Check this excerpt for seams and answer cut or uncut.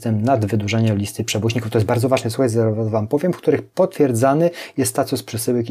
uncut